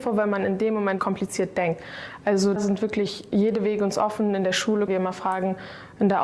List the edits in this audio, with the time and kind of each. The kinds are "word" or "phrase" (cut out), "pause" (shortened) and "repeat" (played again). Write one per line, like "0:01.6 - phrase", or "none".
0:01.0 - word
0:02.6 - word
0:04.9 - word